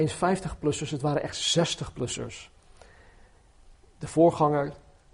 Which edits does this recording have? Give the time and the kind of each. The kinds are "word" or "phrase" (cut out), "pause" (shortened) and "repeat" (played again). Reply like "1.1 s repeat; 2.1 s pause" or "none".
none